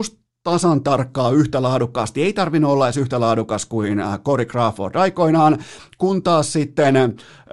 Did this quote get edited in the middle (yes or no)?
no